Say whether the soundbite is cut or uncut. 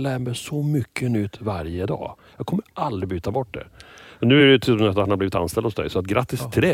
uncut